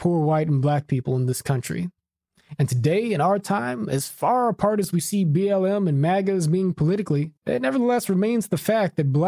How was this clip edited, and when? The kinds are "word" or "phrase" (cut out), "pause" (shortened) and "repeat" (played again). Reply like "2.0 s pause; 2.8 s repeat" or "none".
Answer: 7.4 s pause